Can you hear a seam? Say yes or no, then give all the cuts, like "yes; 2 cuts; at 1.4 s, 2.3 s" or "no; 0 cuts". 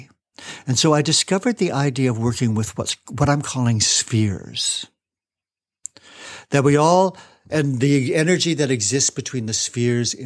no; 0 cuts